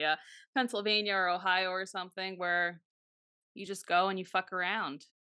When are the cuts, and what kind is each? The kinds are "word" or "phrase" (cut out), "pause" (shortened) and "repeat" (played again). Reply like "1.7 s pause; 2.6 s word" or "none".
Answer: none